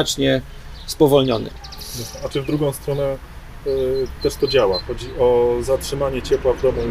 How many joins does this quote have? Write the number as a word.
zero